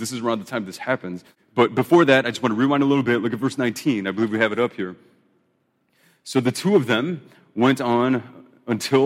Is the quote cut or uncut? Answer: uncut